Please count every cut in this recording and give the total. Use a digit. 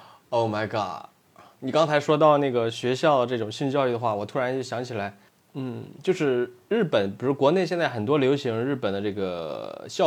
1